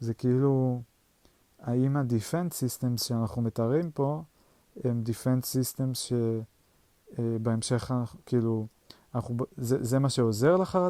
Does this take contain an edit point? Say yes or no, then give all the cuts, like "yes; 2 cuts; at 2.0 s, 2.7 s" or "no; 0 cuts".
no; 0 cuts